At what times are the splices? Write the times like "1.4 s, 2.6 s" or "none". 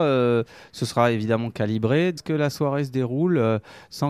2.2 s